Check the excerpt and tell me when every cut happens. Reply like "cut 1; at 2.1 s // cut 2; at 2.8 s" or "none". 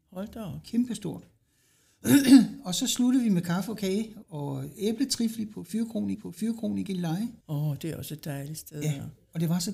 cut 1; at 4.2 s // cut 2; at 6.1 s // cut 3; at 7.4 s

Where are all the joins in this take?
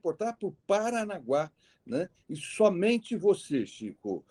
none

